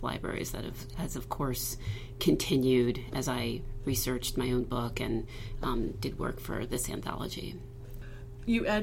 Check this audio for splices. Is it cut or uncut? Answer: uncut